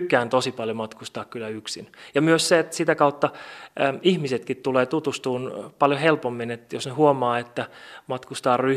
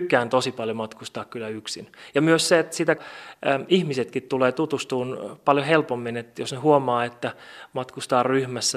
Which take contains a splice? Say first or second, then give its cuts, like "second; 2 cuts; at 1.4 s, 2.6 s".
second; 1 cut; at 3.0 s